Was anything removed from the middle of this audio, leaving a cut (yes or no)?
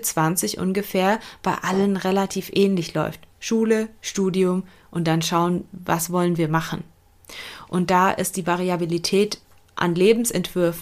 no